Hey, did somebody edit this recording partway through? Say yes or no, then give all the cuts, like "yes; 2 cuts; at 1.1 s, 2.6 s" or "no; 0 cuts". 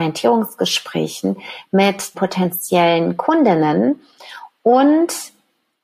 yes; 1 cut; at 2.1 s